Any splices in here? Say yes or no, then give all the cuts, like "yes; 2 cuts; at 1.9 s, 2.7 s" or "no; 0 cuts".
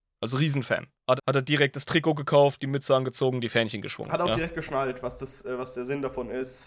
yes; 1 cut; at 1.2 s